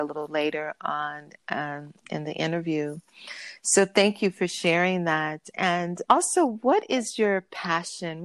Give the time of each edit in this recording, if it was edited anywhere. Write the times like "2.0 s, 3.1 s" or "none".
6.0 s